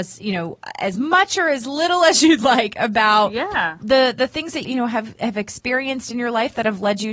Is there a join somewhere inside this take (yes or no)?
yes